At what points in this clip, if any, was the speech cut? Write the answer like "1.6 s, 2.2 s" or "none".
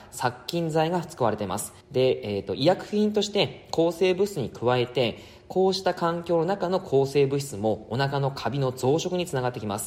1.8 s